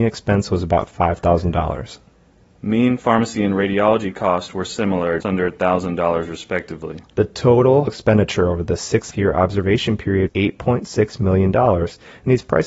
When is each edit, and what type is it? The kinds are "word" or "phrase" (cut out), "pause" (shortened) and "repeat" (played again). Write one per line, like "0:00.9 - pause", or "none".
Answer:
0:05.2 - word
0:07.9 - word
0:09.1 - phrase
0:10.3 - word